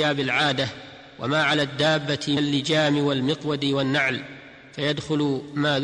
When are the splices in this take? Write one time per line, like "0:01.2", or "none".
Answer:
0:02.4